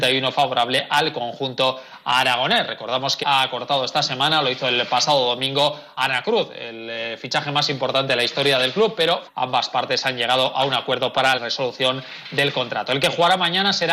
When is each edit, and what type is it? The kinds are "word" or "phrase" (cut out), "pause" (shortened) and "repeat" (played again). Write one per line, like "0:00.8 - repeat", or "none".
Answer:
0:03.2 - word
0:06.0 - word
0:09.3 - word
0:11.4 - word